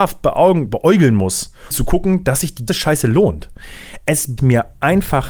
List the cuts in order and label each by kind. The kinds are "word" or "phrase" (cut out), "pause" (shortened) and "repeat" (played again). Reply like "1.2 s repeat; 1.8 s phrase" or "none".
1.7 s word; 2.7 s word; 4.4 s word